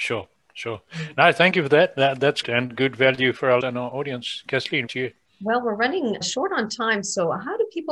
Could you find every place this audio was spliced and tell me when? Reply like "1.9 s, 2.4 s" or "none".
2.4 s, 3.6 s, 4.9 s, 6.2 s